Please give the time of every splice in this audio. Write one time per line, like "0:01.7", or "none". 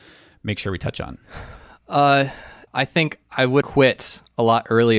0:02.7
0:03.6